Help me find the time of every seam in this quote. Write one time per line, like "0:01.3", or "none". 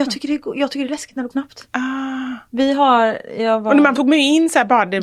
0:01.3
0:04.0